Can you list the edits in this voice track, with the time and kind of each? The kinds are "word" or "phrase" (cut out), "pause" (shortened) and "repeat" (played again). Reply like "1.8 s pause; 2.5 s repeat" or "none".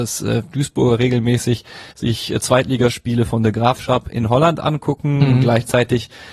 1.9 s pause